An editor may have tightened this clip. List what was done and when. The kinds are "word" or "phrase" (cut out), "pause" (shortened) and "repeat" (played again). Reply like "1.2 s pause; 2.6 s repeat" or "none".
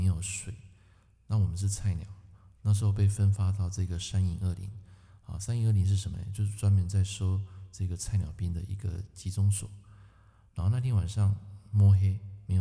none